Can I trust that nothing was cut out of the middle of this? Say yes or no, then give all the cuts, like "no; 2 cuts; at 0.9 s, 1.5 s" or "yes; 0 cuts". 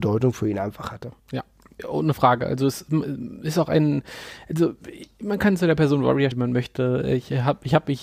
no; 2 cuts; at 1.2 s, 6.3 s